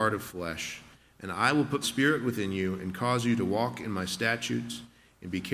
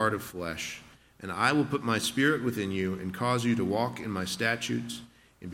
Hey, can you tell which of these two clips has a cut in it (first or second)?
first